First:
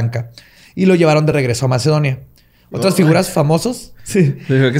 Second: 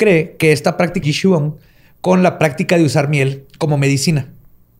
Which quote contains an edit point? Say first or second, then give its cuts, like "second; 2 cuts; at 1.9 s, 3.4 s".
second; 1 cut; at 1.0 s